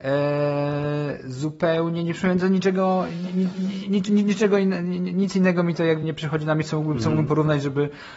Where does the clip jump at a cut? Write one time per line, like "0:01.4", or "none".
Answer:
0:06.0